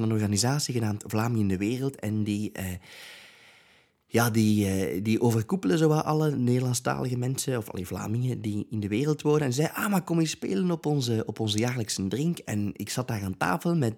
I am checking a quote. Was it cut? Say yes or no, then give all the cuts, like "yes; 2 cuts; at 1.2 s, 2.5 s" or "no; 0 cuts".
no; 0 cuts